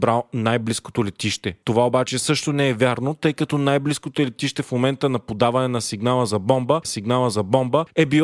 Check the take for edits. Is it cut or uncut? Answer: cut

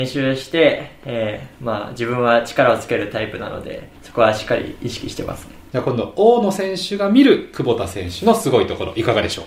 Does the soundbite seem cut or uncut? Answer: cut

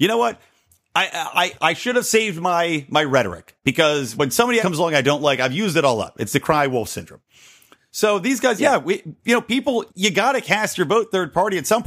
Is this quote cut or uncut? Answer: cut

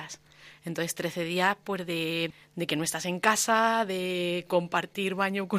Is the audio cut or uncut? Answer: uncut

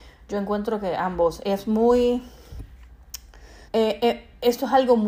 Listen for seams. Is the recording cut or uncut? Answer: cut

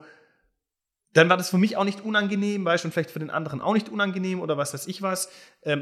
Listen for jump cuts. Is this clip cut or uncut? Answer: uncut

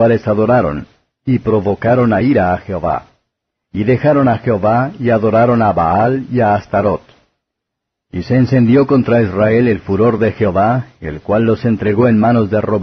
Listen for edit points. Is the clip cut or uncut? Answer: uncut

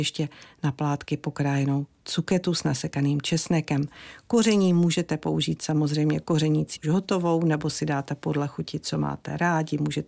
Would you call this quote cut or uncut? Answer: cut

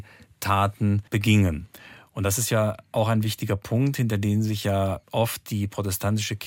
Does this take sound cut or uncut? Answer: cut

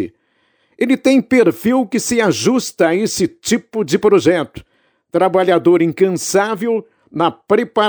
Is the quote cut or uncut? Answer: uncut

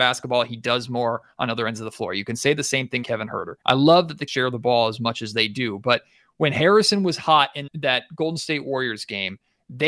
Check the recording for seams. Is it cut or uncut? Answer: cut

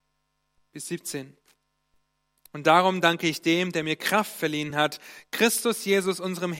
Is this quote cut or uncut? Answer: uncut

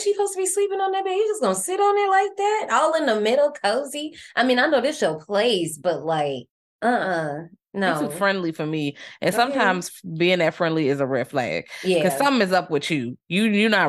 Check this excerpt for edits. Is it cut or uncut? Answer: uncut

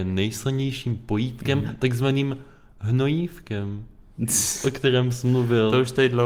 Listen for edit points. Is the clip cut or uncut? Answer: uncut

